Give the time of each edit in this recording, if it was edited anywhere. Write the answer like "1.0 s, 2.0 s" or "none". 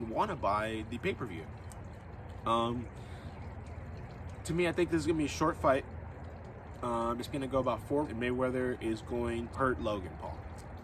7.3 s, 8.0 s, 9.5 s